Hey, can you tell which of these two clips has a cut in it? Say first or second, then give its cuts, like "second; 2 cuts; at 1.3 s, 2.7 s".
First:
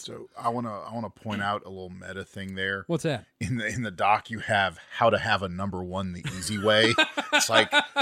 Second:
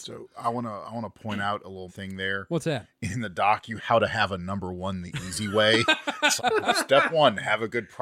second; 4 cuts; at 1.9 s, 3.1 s, 3.8 s, 6.4 s